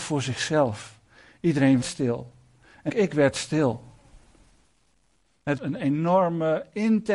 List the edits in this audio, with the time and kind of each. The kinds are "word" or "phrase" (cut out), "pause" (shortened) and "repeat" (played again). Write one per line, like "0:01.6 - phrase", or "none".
0:01.8 - word
0:02.9 - word
0:05.6 - word